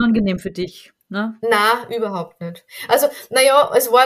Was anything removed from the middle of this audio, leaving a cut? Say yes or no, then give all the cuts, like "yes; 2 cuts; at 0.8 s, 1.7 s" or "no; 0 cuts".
no; 0 cuts